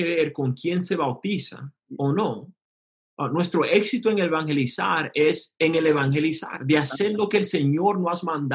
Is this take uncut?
yes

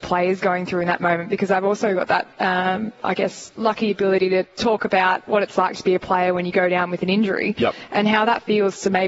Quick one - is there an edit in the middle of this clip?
no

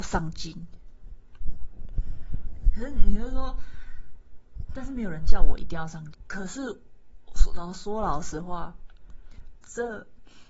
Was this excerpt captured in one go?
no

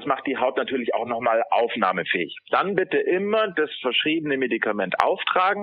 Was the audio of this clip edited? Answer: no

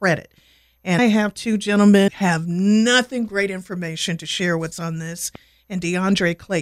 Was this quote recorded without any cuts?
no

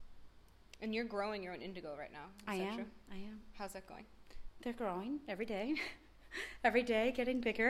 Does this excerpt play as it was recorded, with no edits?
yes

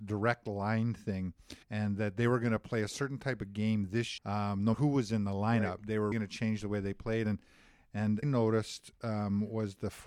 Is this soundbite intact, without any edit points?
no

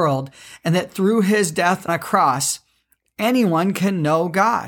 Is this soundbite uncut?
no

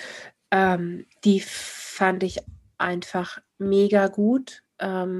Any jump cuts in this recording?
no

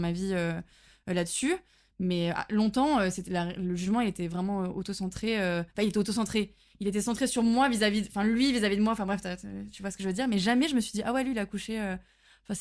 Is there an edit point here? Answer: no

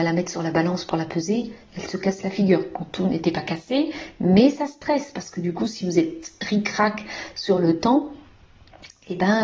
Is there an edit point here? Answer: no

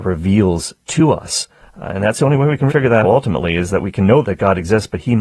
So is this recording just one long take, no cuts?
no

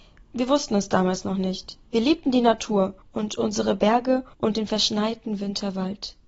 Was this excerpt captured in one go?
no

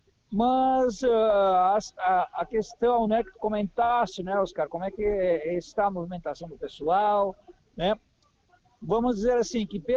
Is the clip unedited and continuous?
yes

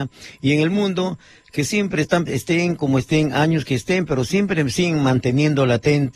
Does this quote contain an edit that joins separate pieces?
yes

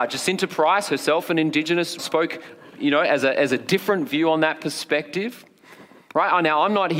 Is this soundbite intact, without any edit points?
no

